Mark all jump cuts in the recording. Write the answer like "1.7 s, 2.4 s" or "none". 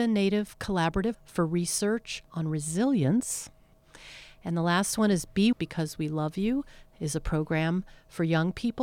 1.1 s, 2.3 s, 5.5 s